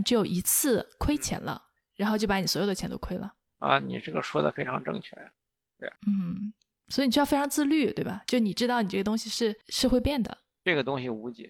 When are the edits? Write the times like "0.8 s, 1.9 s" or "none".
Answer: 6.0 s